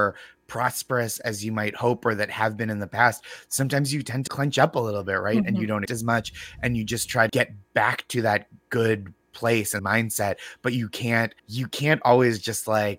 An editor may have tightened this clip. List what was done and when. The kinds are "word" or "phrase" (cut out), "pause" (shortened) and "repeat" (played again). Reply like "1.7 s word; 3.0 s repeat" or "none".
4.3 s word; 5.9 s word; 7.3 s word; 9.2 s pause; 9.8 s phrase; 11.4 s pause